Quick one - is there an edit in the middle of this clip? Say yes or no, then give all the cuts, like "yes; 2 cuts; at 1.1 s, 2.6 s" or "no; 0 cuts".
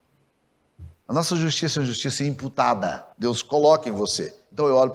yes; 1 cut; at 3.1 s